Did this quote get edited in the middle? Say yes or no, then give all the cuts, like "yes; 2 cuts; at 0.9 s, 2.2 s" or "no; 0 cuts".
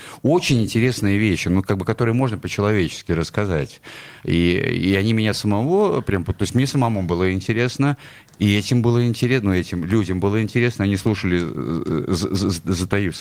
no; 0 cuts